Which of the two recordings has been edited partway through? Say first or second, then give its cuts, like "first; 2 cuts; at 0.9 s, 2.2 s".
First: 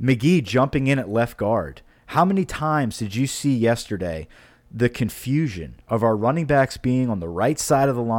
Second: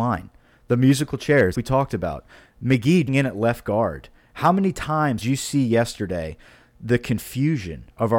second; 3 cuts; at 1.5 s, 3.1 s, 5.2 s